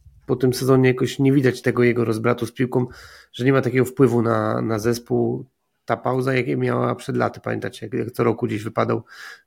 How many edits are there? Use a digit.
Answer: 1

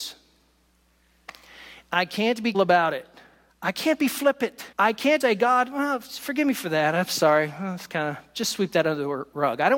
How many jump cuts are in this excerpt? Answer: 4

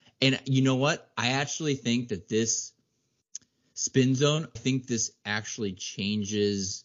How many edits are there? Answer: 1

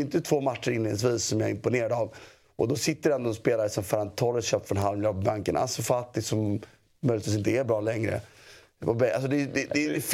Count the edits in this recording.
0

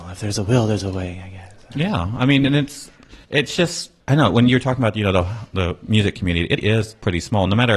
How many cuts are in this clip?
3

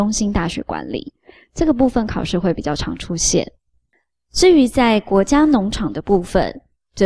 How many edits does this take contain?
0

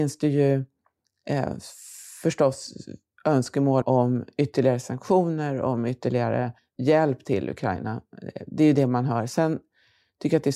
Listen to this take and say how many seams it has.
2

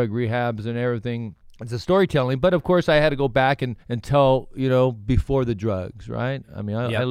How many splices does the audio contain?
2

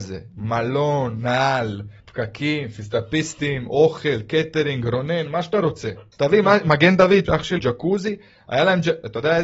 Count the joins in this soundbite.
4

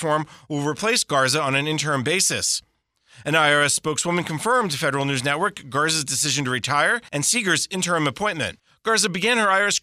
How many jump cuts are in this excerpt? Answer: 0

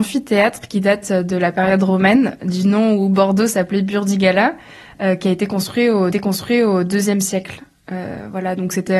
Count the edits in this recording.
1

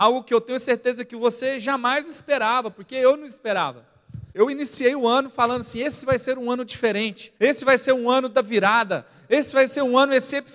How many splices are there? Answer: 2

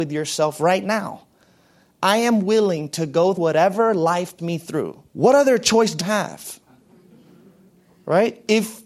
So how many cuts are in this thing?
4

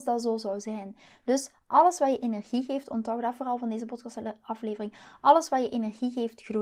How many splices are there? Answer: 0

